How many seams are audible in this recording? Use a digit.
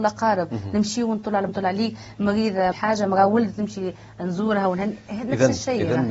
2